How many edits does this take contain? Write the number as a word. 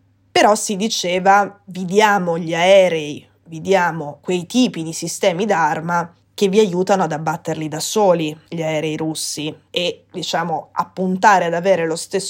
one